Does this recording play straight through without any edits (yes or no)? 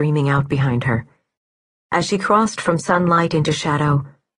yes